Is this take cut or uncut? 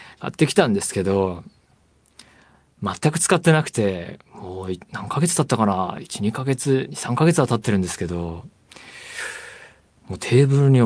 uncut